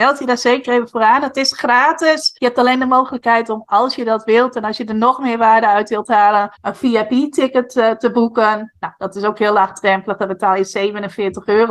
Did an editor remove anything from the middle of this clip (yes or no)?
yes